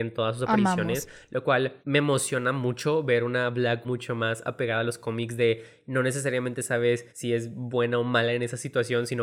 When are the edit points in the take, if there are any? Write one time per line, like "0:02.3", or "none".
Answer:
0:01.8
0:03.8
0:07.1